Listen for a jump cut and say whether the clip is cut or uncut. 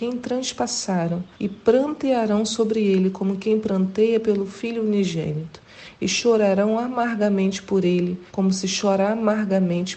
cut